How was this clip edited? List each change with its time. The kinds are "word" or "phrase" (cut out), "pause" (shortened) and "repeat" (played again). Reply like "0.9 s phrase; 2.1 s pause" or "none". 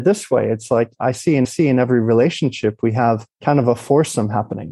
1.4 s repeat; 3.3 s pause